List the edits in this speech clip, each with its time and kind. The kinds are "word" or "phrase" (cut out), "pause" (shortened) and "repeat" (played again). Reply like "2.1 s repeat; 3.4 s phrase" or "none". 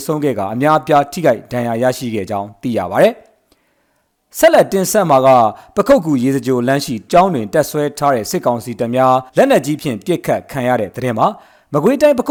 7.1 s word; 9.3 s pause